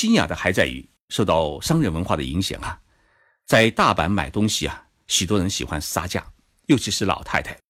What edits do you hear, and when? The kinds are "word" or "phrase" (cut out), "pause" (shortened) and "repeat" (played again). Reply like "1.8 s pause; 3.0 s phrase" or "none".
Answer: none